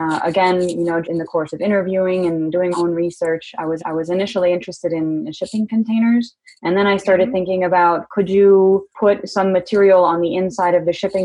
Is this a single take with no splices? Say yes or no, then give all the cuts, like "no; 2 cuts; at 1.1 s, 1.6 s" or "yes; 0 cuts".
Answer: no; 5 cuts; at 1.0 s, 2.7 s, 3.8 s, 6.5 s, 8.9 s